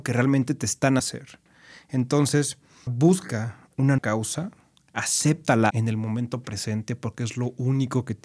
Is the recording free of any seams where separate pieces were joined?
no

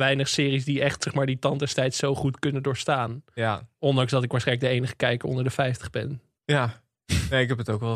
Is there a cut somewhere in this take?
no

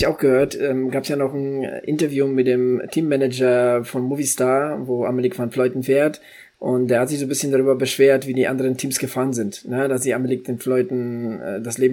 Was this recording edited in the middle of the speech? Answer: no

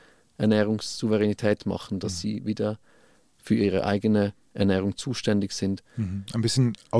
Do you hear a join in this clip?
no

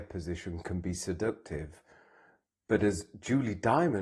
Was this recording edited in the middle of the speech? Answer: no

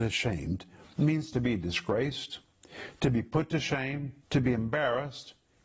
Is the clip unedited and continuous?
no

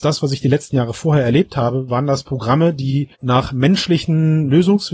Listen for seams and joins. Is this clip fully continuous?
no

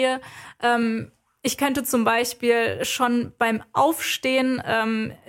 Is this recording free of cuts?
yes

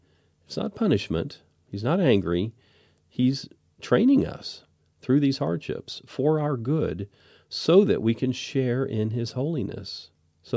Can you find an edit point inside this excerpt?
no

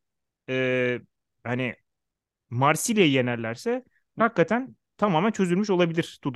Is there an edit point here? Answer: yes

